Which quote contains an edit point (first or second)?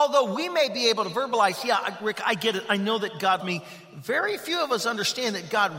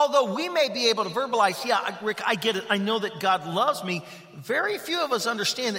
first